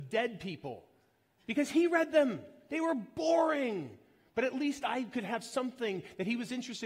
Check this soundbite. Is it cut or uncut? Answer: uncut